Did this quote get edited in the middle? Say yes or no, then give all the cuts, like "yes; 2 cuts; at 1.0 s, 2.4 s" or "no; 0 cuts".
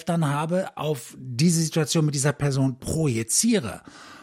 no; 0 cuts